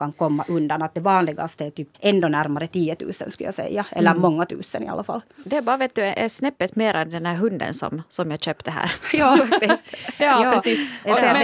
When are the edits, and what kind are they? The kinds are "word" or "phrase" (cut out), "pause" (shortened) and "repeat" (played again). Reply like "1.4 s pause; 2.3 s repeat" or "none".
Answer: 1.9 s pause

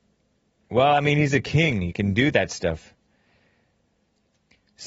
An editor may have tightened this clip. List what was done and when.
none

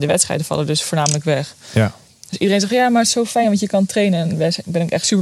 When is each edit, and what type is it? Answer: none

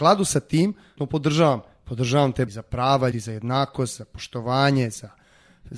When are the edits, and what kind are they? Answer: 1.0 s word; 2.5 s word; 3.1 s word

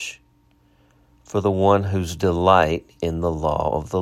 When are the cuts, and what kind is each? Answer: 3.0 s word

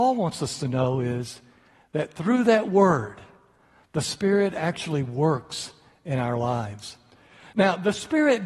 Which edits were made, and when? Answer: none

